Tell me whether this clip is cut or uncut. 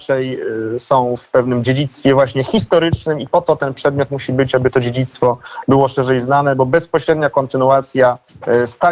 uncut